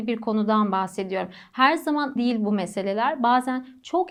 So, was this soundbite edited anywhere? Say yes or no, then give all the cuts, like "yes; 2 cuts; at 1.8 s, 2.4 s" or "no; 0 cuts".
yes; 1 cut; at 2.2 s